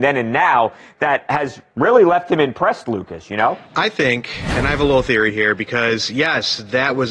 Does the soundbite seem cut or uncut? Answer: cut